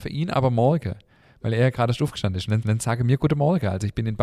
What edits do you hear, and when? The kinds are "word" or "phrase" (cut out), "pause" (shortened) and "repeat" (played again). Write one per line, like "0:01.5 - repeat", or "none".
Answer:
0:02.6 - repeat